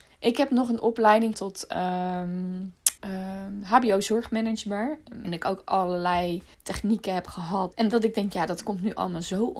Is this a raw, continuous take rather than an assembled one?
no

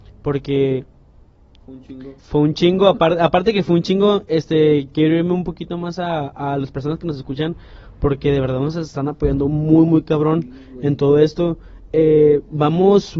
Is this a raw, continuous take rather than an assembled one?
no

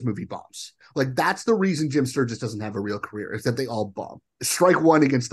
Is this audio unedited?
yes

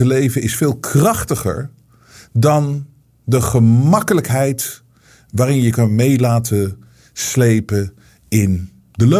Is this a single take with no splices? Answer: yes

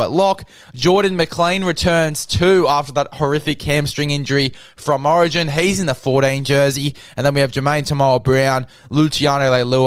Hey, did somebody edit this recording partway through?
no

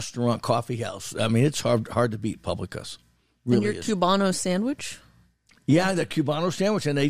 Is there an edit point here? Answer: no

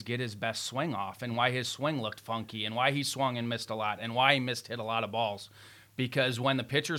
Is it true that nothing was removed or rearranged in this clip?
yes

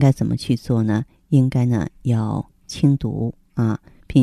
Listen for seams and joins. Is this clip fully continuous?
yes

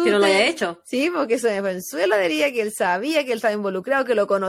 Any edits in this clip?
no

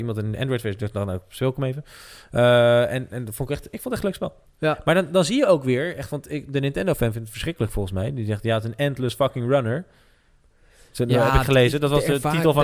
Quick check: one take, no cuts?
no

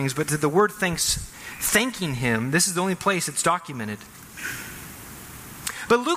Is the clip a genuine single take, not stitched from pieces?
yes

